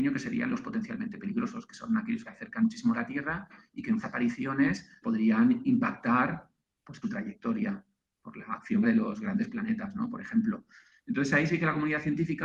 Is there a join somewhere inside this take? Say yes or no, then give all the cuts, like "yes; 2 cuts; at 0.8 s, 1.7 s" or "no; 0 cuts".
yes; 6 cuts; at 2.3 s, 2.6 s, 4.0 s, 5.0 s, 7.0 s, 8.8 s